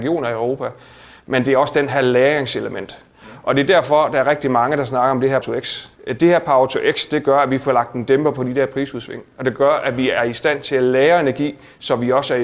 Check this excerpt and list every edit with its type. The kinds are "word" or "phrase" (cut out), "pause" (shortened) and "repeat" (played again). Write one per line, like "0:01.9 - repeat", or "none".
0:05.4 - word
0:06.0 - pause